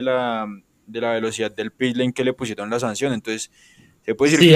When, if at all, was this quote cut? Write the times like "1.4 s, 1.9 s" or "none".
none